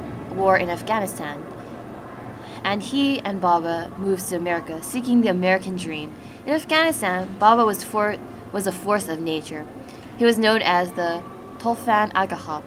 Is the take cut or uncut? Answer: uncut